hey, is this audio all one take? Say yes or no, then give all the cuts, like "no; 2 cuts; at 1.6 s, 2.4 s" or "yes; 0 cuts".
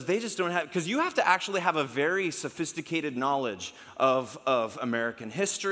yes; 0 cuts